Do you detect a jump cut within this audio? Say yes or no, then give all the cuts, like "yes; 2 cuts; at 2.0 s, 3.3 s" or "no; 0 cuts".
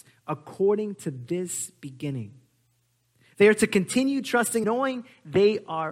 yes; 1 cut; at 4.6 s